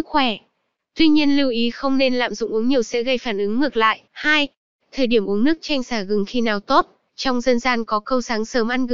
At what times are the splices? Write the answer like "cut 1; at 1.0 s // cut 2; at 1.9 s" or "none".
cut 1; at 4.1 s // cut 2; at 7.1 s